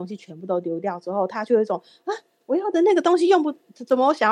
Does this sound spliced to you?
no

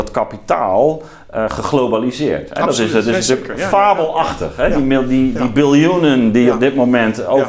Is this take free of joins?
yes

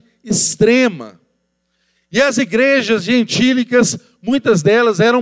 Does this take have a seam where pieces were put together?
no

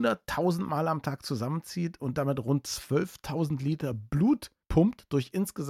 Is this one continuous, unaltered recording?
yes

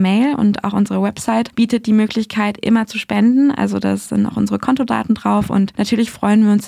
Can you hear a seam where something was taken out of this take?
no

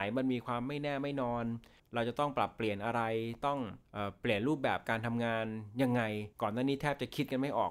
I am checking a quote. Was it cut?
yes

